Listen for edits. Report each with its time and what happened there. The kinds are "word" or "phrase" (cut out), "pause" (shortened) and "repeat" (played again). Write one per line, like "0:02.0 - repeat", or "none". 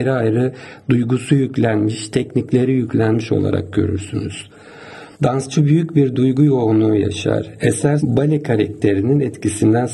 0:05.1 - pause
0:08.0 - phrase